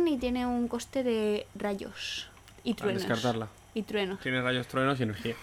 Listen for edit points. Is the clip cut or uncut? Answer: uncut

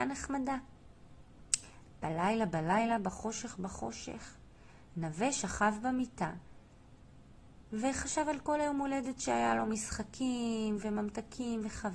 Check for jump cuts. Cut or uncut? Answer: uncut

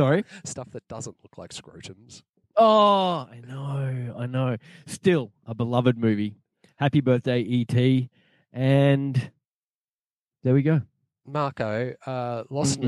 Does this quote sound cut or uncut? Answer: uncut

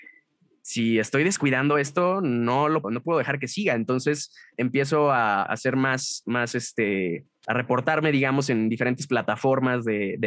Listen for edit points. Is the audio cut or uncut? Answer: cut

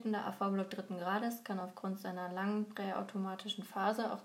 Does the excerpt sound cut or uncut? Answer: uncut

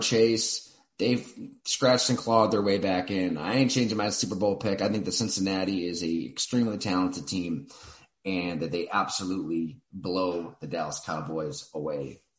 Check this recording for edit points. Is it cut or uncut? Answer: cut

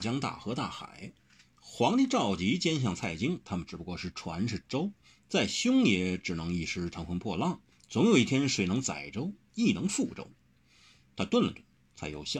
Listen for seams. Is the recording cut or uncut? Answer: uncut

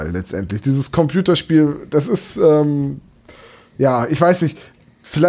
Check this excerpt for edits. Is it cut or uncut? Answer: uncut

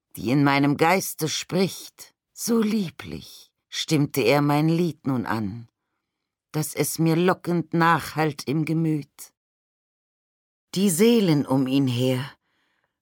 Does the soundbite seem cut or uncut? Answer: cut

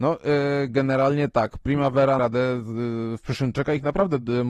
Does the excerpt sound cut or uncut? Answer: cut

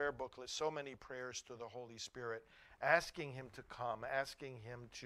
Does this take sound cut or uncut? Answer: uncut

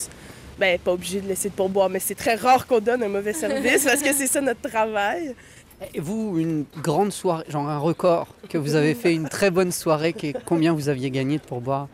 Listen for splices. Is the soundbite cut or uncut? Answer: cut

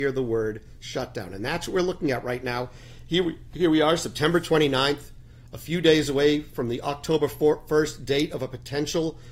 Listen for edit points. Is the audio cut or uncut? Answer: uncut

